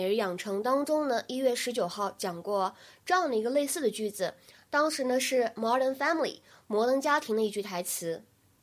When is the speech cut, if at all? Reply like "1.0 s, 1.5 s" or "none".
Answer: none